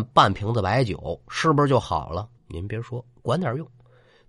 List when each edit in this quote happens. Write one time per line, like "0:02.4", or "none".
0:02.4